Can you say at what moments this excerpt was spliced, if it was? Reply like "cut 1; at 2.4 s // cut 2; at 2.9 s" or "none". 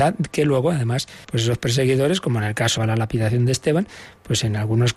cut 1; at 1.2 s // cut 2; at 2.8 s

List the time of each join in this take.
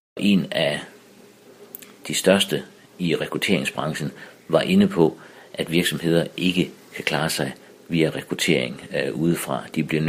none

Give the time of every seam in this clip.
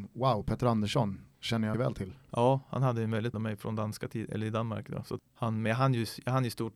cut 1; at 1.7 s // cut 2; at 3.3 s // cut 3; at 5.2 s

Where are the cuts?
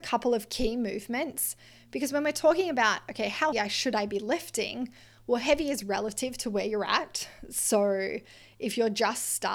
cut 1; at 3.5 s

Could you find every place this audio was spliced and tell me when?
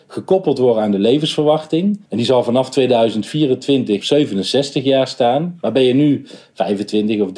cut 1; at 2.0 s // cut 2; at 4.0 s

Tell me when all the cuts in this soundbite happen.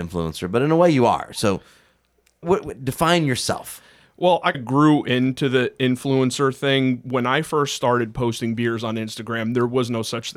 cut 1; at 2.4 s // cut 2; at 4.5 s

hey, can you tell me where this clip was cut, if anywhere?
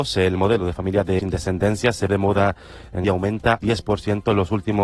cut 1; at 1.2 s // cut 2; at 2.1 s // cut 3; at 3.0 s // cut 4; at 3.6 s

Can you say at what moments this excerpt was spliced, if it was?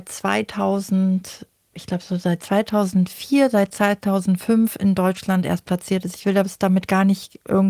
none

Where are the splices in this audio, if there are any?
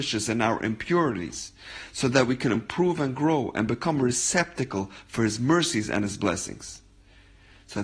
none

